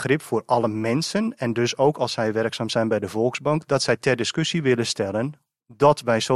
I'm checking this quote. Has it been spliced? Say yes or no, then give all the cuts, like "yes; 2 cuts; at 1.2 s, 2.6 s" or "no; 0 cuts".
no; 0 cuts